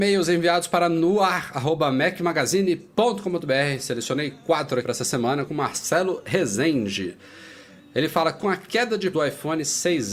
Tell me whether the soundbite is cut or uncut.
cut